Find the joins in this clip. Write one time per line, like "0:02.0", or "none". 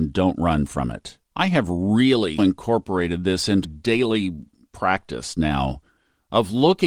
0:01.3
0:02.4
0:03.6